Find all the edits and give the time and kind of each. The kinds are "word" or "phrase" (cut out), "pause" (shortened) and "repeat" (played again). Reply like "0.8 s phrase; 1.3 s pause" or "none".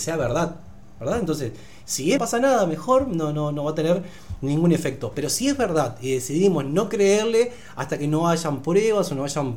2.2 s phrase

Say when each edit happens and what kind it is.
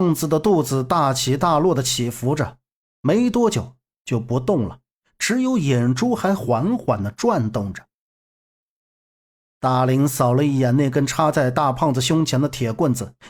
none

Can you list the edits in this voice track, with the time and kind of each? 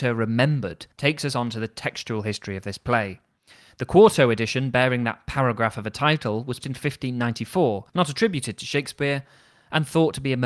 0.9 s pause; 6.6 s word; 7.9 s pause

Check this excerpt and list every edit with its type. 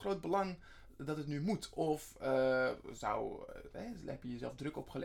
none

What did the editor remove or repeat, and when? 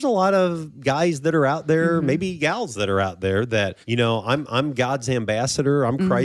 3.8 s pause

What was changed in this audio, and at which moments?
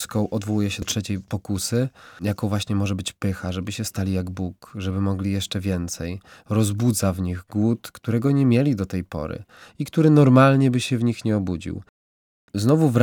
none

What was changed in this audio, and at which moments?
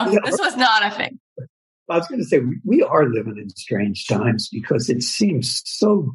none

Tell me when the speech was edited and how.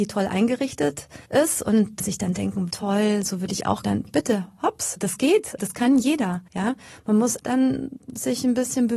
1.2 s pause; 2.7 s word; 3.8 s phrase; 5.0 s word; 5.6 s word; 6.5 s pause; 7.4 s word

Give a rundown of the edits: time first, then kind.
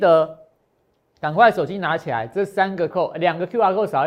2.9 s word

